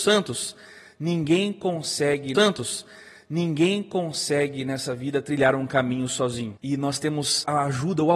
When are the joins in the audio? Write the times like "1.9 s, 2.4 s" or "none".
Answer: 2.3 s